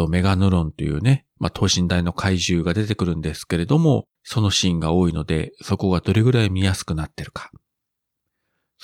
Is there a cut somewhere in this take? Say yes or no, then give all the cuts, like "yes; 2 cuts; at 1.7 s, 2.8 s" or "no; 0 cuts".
yes; 1 cut; at 4.2 s